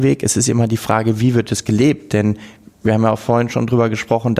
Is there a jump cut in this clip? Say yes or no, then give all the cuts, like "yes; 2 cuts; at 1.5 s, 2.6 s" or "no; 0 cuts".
no; 0 cuts